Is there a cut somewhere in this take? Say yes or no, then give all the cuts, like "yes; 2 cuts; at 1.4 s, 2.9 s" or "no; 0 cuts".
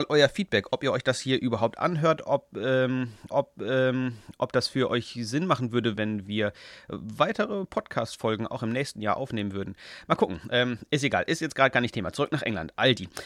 yes; 2 cuts; at 3.3 s, 6.0 s